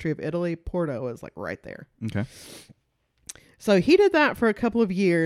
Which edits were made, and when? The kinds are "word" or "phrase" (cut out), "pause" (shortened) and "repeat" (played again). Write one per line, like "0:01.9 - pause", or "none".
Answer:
none